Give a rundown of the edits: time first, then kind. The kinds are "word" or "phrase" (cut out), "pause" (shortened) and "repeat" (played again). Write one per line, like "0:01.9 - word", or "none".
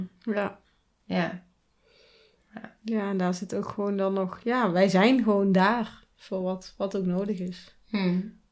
none

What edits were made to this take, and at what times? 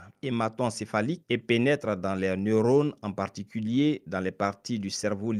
0:01.2 - pause

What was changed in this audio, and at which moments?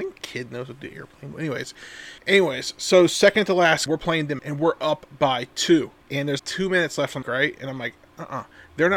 0:02.2 - pause
0:03.9 - phrase
0:04.4 - word
0:06.0 - pause
0:06.4 - word
0:07.2 - phrase

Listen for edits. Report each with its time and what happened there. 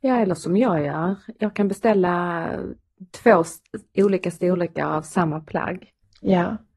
none

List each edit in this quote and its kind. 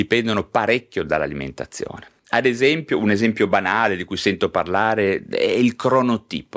0:02.2 - pause

